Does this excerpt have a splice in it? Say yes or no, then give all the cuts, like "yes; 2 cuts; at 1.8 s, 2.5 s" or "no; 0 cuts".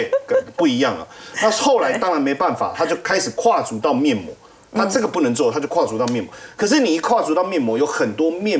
no; 0 cuts